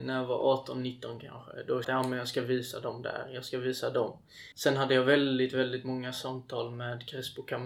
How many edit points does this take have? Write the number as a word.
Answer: two